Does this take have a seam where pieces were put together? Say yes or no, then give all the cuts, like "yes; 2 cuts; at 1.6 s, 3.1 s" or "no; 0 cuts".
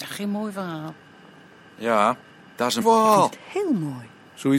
yes; 1 cut; at 2.8 s